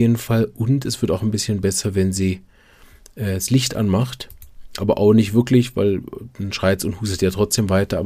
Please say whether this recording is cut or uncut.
uncut